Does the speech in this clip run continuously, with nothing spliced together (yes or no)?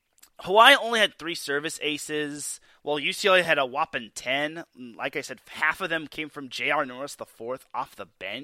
yes